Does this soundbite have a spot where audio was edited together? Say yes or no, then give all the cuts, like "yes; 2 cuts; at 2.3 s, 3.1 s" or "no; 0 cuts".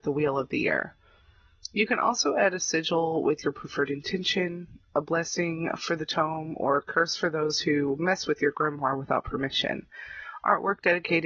no; 0 cuts